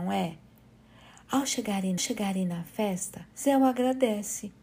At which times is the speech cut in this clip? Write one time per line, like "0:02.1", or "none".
0:02.0
0:03.3